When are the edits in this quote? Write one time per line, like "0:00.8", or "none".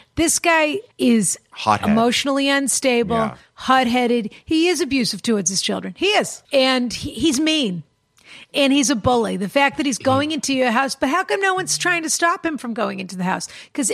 0:00.9
0:06.4